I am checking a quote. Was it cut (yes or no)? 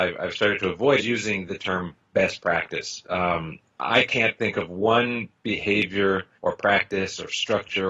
yes